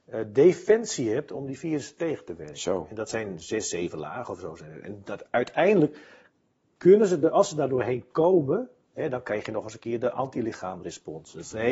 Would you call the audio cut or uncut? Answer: uncut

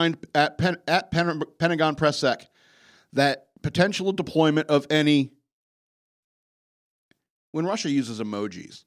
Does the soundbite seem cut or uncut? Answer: uncut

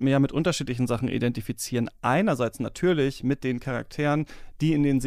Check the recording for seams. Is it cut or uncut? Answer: uncut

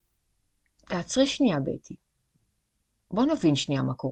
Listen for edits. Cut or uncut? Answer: uncut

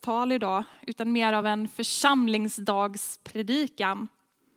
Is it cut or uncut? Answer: uncut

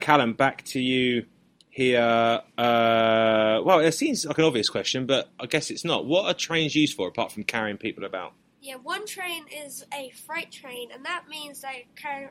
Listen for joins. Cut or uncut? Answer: uncut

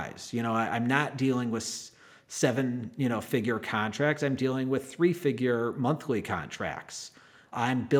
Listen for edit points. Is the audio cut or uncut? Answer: uncut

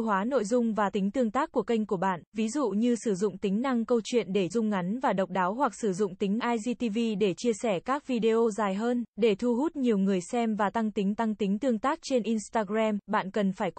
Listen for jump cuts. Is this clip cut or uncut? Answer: cut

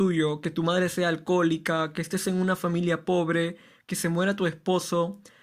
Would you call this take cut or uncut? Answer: uncut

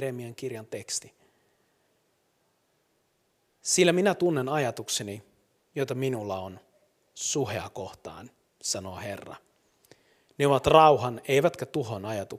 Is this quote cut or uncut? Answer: uncut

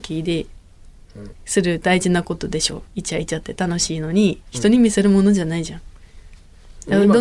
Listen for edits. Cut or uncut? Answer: cut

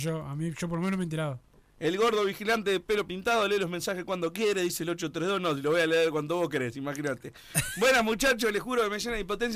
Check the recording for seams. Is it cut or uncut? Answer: uncut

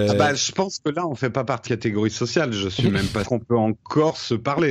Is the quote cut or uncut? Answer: cut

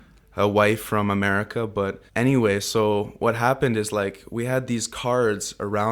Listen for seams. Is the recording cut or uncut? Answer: cut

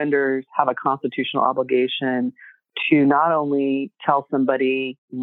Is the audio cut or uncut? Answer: uncut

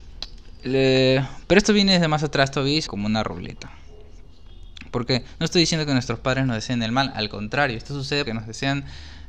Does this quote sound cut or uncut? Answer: cut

